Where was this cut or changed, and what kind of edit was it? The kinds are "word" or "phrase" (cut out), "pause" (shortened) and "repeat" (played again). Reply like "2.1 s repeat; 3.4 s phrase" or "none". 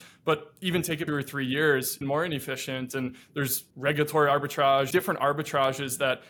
1.1 s phrase; 2.0 s word; 3.7 s pause; 4.9 s phrase